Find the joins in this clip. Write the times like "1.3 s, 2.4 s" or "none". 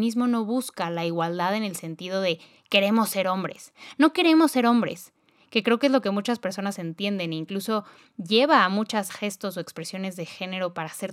9.1 s